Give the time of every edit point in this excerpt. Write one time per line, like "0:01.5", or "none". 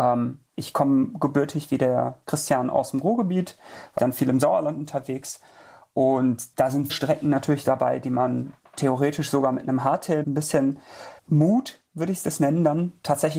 0:04.0
0:06.5
0:06.9
0:10.2
0:11.2